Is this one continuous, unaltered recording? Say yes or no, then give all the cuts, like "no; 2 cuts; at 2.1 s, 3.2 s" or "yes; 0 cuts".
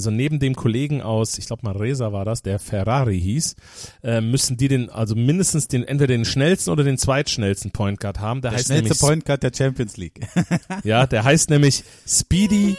yes; 0 cuts